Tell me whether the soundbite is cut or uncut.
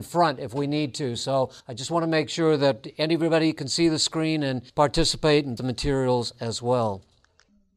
cut